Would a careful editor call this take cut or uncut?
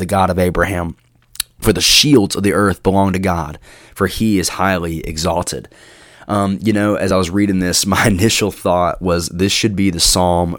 uncut